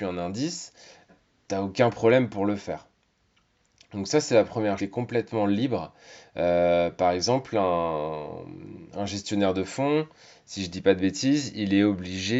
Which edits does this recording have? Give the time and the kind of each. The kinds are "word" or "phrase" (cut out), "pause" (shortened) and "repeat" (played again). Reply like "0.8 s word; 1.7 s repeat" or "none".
1.1 s word; 4.8 s phrase